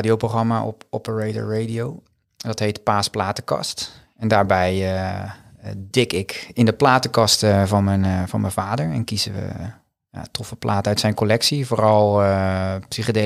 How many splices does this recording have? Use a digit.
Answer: 0